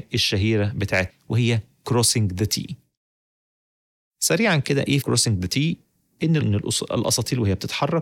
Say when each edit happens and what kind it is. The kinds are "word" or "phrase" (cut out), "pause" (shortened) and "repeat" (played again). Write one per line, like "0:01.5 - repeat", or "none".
0:01.1 - word
0:05.0 - word
0:06.4 - word